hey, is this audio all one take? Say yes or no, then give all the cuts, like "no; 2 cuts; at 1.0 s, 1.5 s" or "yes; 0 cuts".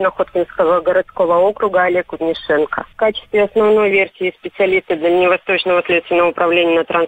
yes; 0 cuts